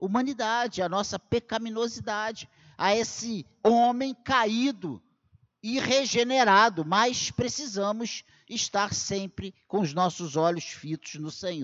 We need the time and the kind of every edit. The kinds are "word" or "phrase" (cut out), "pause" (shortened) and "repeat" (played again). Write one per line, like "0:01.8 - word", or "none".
none